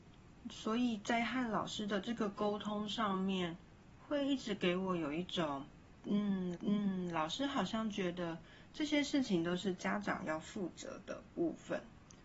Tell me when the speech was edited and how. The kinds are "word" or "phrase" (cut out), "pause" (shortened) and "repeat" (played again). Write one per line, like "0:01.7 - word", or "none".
0:06.5 - repeat